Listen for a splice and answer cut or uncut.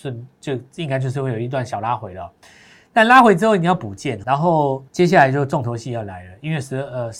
cut